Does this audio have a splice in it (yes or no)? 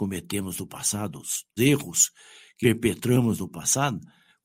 yes